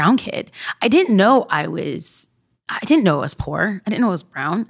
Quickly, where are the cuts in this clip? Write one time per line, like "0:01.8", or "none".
none